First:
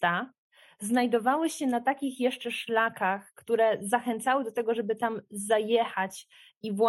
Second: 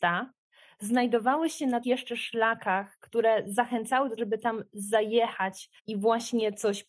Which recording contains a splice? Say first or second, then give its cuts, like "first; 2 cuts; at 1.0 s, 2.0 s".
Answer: second; 3 cuts; at 1.8 s, 4.2 s, 5.8 s